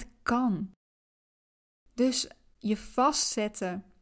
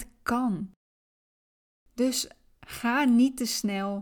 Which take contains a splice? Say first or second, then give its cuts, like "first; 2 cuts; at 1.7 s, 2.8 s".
first; 1 cut; at 2.5 s